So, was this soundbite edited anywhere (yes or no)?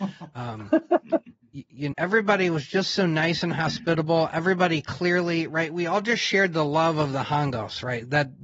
yes